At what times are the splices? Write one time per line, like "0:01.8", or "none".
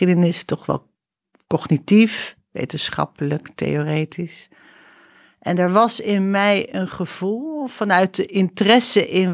none